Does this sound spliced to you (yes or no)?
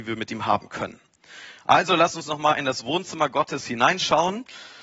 no